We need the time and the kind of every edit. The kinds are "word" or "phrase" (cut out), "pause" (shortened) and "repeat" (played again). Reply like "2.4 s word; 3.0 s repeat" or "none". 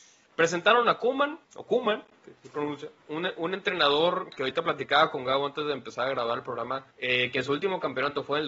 1.4 s pause; 3.0 s pause; 6.9 s pause